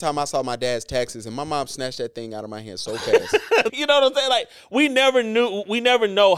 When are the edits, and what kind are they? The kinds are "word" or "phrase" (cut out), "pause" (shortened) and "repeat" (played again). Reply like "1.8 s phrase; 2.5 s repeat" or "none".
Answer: 3.7 s word